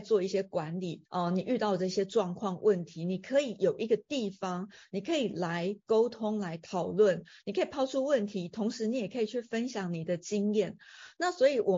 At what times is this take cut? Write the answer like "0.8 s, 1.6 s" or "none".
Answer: 1.1 s